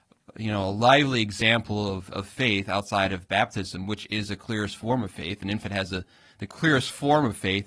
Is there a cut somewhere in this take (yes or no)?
no